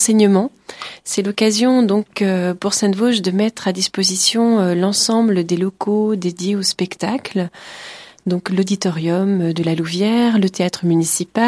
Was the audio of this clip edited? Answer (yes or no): no